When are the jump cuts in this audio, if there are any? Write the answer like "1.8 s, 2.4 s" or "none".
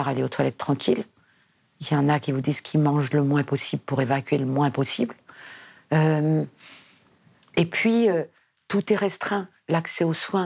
none